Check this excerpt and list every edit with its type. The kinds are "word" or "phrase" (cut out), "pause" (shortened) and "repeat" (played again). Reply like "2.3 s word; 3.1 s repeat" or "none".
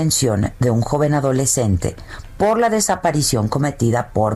none